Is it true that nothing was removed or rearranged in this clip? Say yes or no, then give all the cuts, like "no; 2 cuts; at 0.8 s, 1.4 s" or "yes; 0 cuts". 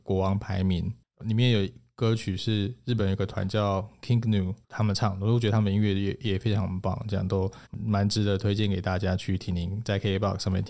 no; 2 cuts; at 4.6 s, 7.7 s